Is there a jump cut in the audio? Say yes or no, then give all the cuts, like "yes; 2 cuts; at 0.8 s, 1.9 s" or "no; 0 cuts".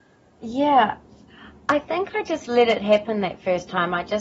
no; 0 cuts